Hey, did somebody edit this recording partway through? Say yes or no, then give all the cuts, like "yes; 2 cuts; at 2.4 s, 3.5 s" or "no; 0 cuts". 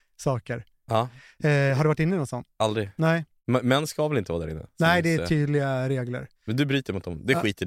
yes; 1 cut; at 6.4 s